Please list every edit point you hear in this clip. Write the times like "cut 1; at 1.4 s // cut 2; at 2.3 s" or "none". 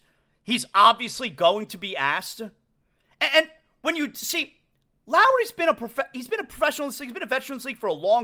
none